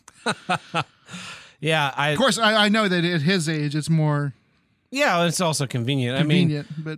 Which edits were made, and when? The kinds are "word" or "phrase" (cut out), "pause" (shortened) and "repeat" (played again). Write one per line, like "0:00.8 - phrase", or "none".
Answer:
none